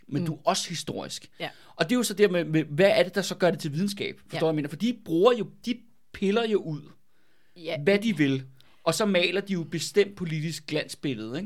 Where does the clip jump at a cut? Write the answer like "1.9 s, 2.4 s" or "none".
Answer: none

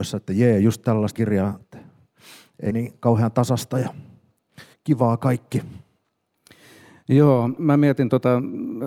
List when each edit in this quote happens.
1.2 s, 1.6 s, 2.7 s, 4.7 s, 7.6 s

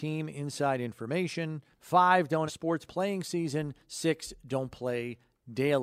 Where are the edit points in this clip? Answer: 1.7 s, 2.5 s, 2.9 s, 3.8 s

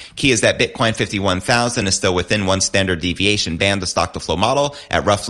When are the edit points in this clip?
none

